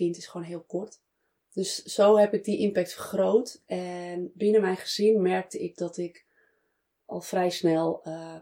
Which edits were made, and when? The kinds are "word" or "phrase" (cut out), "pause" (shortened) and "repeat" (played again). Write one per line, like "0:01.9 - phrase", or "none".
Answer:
none